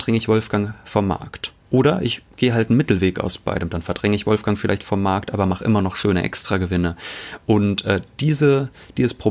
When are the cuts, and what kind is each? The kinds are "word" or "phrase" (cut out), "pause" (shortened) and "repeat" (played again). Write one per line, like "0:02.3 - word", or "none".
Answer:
0:01.6 - pause